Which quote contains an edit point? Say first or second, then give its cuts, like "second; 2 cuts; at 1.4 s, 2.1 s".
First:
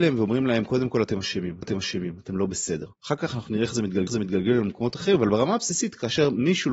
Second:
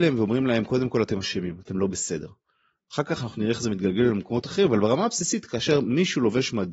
first; 3 cuts; at 1.6 s, 2.9 s, 4.1 s